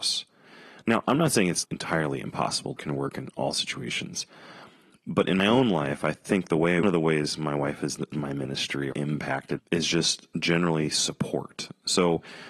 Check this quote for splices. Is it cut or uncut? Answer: cut